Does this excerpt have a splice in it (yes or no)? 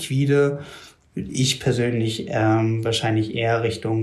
no